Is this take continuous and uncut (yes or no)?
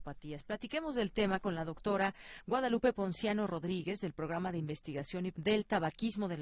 no